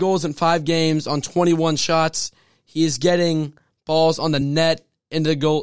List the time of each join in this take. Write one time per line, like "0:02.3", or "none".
none